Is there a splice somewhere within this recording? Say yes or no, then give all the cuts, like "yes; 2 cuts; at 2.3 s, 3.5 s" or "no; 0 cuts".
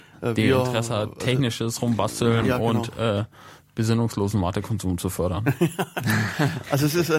no; 0 cuts